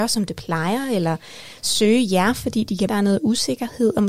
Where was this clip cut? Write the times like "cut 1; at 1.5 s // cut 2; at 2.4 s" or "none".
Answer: cut 1; at 2.9 s